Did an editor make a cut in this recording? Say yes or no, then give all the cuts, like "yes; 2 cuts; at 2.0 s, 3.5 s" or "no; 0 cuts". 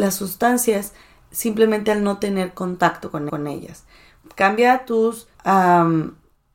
yes; 2 cuts; at 3.3 s, 5.3 s